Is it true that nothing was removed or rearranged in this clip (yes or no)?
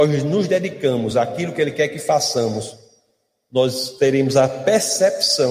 yes